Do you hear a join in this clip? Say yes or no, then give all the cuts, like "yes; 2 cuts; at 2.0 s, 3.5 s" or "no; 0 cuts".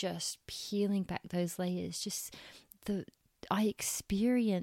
no; 0 cuts